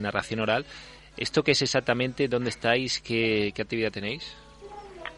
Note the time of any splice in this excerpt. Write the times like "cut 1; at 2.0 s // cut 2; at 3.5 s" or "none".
none